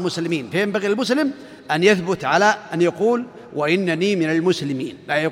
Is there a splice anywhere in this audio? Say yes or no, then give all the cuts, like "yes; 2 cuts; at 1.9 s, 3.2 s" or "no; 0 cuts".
no; 0 cuts